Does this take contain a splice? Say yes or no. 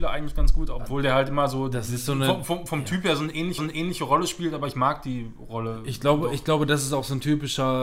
yes